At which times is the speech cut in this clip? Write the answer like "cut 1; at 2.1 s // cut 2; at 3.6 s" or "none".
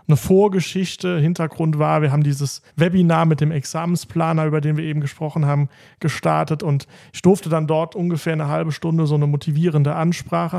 cut 1; at 2.7 s